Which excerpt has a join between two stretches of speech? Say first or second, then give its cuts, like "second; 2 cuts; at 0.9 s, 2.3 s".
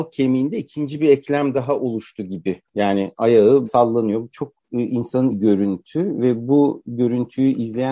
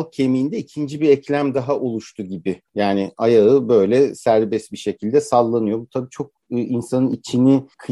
first; 3 cuts; at 3.6 s, 4.3 s, 5.3 s